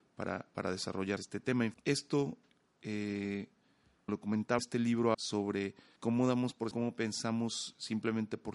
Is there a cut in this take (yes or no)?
yes